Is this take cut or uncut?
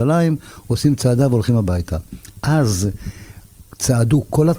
uncut